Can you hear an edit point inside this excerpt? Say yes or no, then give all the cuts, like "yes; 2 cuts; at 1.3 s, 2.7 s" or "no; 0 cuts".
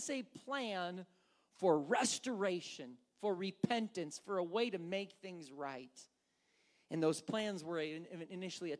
no; 0 cuts